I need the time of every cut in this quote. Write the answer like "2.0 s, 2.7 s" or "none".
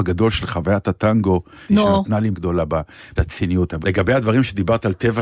1.7 s, 2.3 s, 3.2 s, 3.8 s